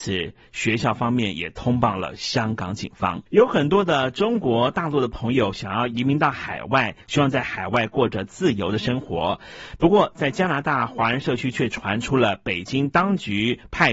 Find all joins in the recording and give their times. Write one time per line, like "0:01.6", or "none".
0:03.3